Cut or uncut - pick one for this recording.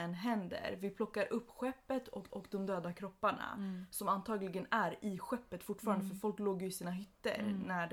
cut